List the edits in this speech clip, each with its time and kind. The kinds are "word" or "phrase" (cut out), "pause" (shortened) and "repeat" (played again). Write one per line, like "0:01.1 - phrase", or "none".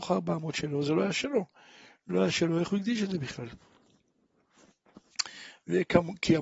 none